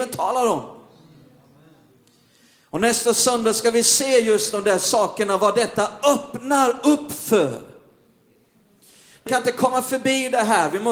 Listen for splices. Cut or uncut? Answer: cut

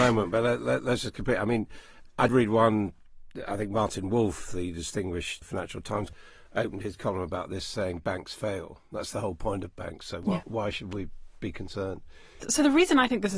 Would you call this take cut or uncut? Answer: cut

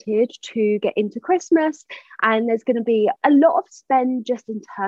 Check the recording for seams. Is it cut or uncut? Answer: cut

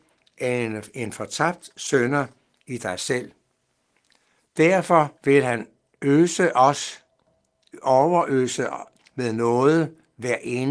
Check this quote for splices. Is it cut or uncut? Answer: cut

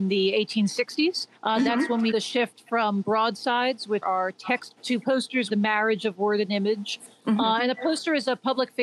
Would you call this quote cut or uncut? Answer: cut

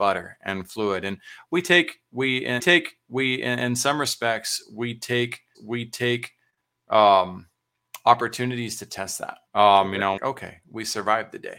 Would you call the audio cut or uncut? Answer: cut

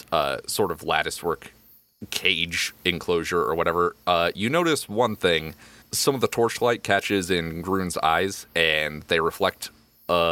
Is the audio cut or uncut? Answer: cut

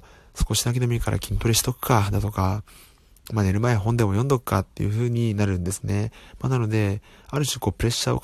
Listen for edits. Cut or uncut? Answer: uncut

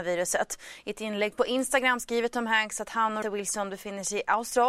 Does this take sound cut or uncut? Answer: cut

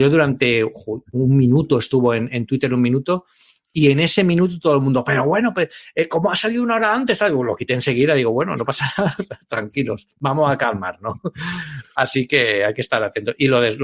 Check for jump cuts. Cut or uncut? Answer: uncut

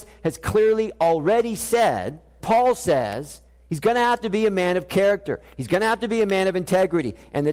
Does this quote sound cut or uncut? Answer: cut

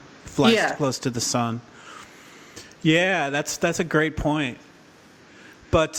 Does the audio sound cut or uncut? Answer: uncut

